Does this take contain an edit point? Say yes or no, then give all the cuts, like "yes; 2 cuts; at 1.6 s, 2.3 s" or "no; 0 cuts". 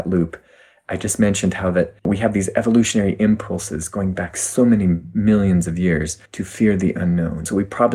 yes; 2 cuts; at 2.0 s, 6.3 s